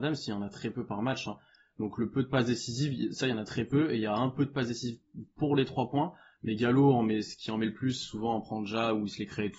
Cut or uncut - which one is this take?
uncut